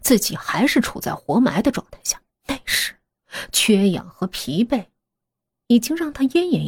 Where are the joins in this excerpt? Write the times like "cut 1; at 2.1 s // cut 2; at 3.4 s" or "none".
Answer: cut 1; at 2.3 s